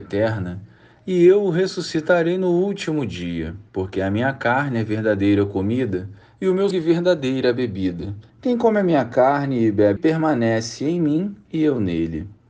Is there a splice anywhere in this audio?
yes; 5 cuts; at 3.7 s, 6.2 s, 6.7 s, 8.3 s, 10.0 s

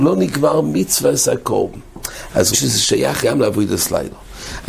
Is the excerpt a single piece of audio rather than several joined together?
no; 2 cuts; at 2.5 s, 3.2 s

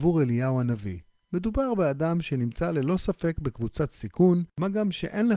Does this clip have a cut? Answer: no; 0 cuts

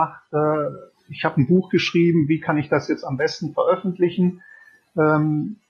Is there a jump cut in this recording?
no; 0 cuts

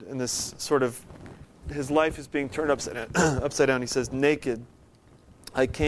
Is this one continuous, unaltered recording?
yes; 0 cuts

